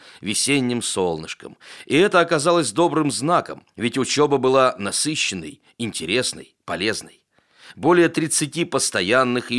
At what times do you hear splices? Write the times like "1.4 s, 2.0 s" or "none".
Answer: 3.7 s